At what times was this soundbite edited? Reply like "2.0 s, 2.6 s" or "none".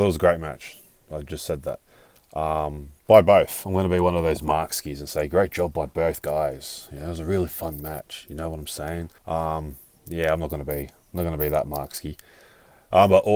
3.0 s, 9.2 s